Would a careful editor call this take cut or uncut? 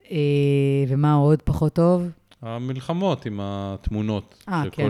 uncut